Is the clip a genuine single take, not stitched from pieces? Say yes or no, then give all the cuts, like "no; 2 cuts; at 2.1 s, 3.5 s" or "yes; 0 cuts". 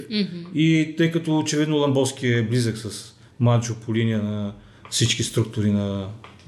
yes; 0 cuts